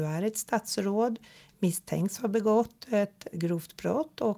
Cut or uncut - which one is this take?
cut